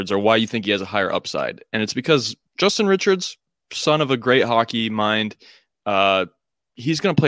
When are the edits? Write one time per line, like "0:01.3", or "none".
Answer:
none